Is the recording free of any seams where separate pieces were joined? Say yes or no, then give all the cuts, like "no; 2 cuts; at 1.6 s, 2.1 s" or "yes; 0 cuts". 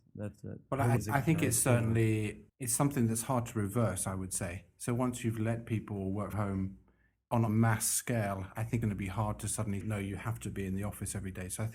no; 6 cuts; at 1.0 s, 2.5 s, 6.3 s, 7.5 s, 8.8 s, 9.8 s